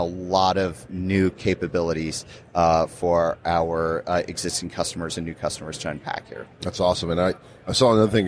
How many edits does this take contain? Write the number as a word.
one